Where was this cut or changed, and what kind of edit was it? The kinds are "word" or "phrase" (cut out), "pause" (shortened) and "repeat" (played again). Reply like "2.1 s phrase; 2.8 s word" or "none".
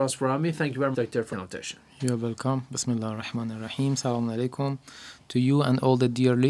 0.9 s word; 1.3 s word